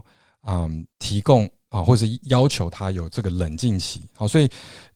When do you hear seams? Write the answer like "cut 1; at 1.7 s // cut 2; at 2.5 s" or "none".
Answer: cut 1; at 0.9 s